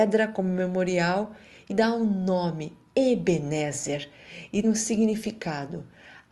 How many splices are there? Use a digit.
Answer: 2